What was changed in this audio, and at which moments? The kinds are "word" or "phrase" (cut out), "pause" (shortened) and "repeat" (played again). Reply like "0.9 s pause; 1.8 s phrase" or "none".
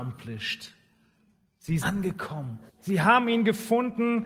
1.8 s word; 2.7 s pause